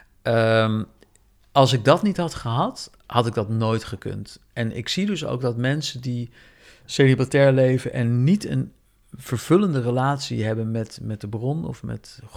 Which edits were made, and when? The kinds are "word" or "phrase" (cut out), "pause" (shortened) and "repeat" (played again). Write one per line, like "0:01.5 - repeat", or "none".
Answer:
0:03.0 - pause